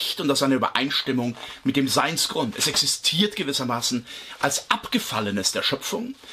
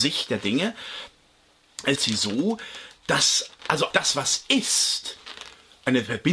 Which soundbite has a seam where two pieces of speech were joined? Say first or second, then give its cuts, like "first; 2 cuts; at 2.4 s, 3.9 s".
second; 2 cuts; at 2.0 s, 3.9 s